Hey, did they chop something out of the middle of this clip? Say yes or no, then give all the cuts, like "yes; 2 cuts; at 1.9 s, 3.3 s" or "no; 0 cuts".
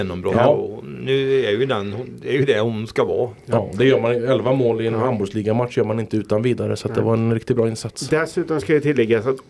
no; 0 cuts